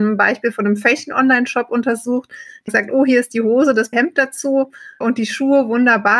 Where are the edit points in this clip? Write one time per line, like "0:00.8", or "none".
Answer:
0:02.7
0:03.9
0:05.0